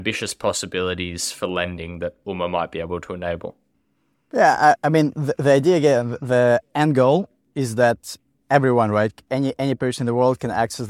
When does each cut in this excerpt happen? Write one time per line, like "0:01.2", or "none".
none